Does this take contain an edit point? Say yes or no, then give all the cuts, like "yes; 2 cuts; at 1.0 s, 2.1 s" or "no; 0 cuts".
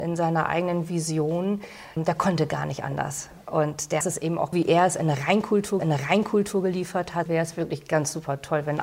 yes; 5 cuts; at 2.0 s, 4.0 s, 4.5 s, 5.8 s, 7.3 s